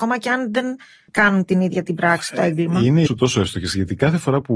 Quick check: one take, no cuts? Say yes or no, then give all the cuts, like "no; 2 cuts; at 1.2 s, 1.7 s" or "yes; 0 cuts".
no; 2 cuts; at 1.4 s, 3.1 s